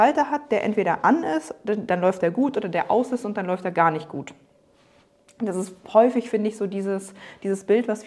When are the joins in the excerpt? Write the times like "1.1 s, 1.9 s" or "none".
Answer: none